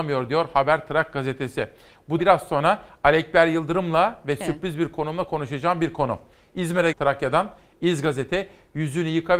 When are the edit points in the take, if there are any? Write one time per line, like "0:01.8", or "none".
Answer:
0:02.2
0:06.9